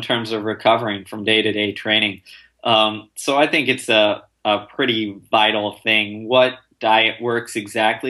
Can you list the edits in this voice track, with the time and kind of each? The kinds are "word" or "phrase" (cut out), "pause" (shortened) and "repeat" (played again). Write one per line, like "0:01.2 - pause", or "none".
none

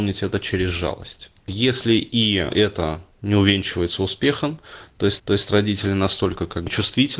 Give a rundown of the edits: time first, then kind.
0:05.2 - repeat

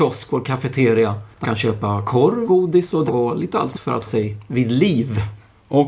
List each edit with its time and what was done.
0:01.4 - word
0:02.5 - word
0:03.1 - word
0:03.7 - word
0:04.1 - word

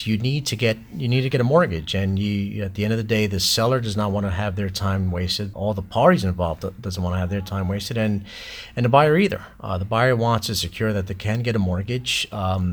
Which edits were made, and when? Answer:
0:05.5 - word

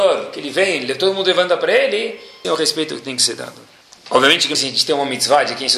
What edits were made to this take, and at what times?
0:02.4 - word
0:03.8 - pause
0:04.5 - word

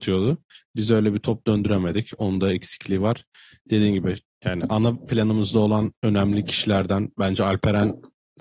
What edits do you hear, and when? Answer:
none

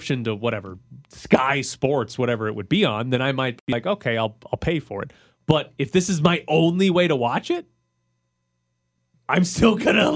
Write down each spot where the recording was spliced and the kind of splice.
none

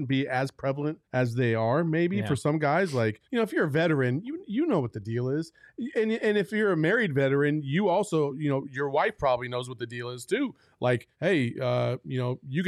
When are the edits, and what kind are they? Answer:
0:01.0 - pause
0:03.2 - pause
0:11.1 - pause

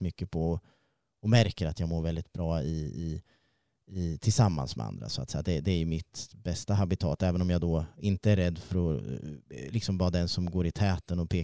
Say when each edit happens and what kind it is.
none

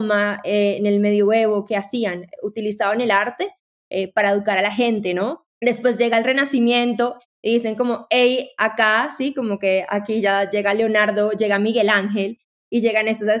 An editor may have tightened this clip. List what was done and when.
0:05.5 - pause

